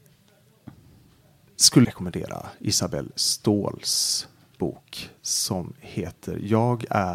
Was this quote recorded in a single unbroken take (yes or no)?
no